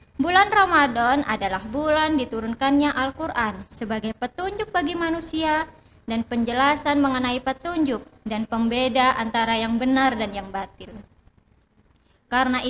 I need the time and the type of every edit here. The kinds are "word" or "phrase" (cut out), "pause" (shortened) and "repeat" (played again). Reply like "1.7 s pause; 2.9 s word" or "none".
none